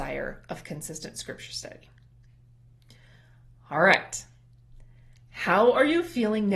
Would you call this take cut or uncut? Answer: uncut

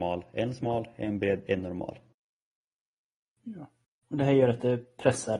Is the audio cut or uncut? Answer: uncut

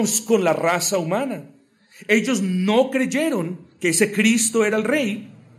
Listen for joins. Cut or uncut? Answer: uncut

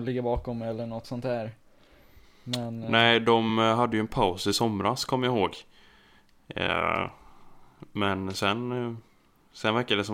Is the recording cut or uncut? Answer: uncut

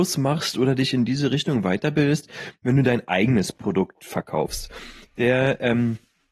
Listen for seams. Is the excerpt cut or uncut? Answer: uncut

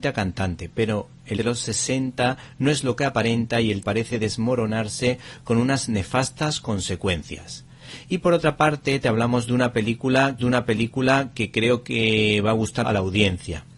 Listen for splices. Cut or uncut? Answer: cut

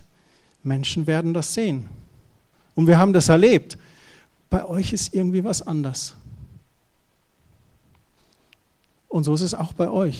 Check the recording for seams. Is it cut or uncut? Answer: uncut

